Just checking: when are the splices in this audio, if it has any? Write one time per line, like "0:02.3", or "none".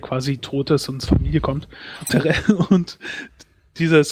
0:01.1
0:02.1